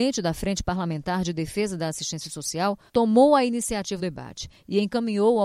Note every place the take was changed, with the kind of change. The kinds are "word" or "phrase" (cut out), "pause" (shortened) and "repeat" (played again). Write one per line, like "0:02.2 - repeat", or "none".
0:02.9 - pause
0:04.0 - word